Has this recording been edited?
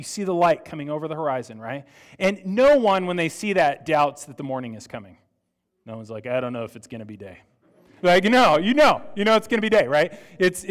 no; 0 cuts

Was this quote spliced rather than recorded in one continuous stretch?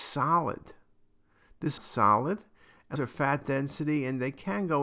yes; 2 cuts; at 1.8 s, 3.0 s

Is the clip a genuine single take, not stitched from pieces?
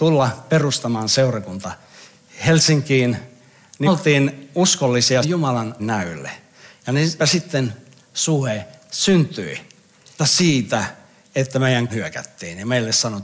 no; 6 cuts; at 3.9 s, 5.2 s, 5.8 s, 7.2 s, 10.2 s, 11.9 s

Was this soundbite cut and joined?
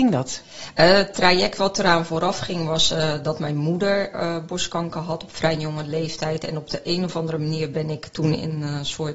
no; 0 cuts

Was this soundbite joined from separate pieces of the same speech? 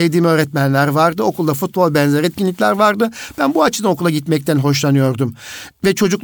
no; 0 cuts

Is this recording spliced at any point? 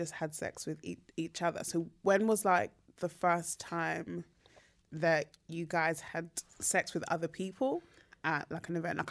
no; 0 cuts

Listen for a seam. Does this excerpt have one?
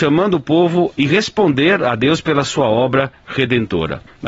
yes; 1 cut; at 0.9 s

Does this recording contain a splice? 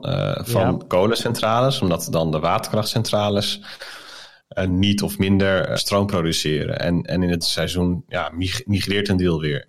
yes; 2 cuts; at 5.8 s, 7.4 s

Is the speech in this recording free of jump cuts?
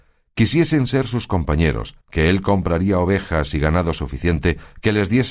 no; 1 cut; at 2.0 s

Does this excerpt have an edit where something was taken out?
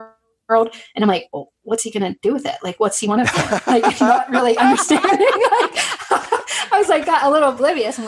no; 0 cuts

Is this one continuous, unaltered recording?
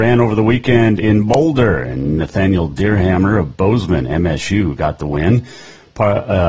yes; 0 cuts

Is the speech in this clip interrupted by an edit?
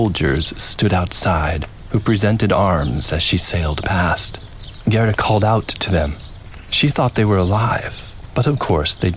no; 0 cuts

